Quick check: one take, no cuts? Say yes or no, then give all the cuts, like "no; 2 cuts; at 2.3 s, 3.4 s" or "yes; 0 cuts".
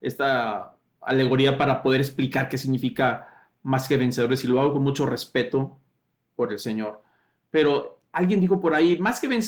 yes; 0 cuts